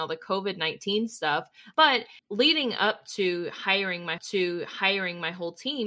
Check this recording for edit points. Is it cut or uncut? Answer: cut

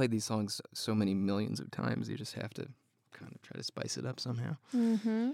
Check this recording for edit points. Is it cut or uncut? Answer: uncut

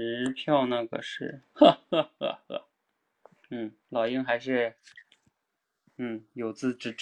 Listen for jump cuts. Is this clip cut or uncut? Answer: cut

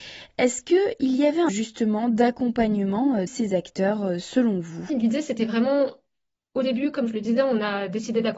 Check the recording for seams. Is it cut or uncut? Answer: cut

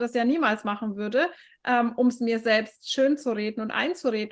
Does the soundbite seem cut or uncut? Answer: uncut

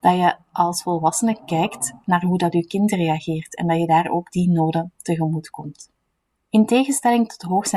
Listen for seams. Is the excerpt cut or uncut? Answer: uncut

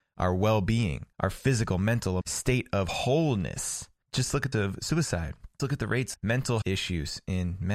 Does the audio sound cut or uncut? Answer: cut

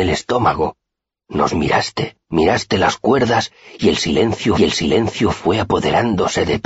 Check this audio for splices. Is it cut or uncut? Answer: cut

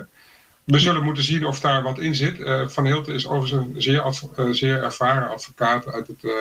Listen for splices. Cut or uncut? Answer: uncut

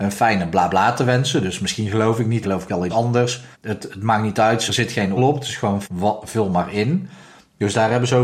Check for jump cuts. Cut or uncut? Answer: cut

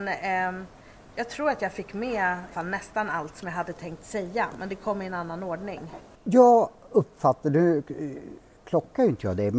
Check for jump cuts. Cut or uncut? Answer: cut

